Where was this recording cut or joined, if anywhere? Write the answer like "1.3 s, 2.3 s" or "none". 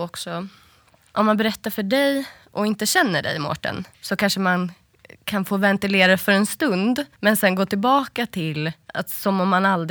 3.9 s, 7.1 s, 8.8 s